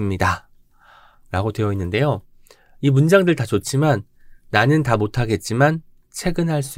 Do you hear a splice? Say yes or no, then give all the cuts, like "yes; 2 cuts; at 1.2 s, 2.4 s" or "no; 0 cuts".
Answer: no; 0 cuts